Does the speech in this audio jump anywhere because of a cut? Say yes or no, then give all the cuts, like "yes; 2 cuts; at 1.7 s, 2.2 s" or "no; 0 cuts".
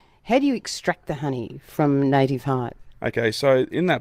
no; 0 cuts